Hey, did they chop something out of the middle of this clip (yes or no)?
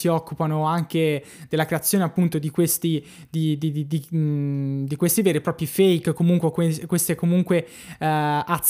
no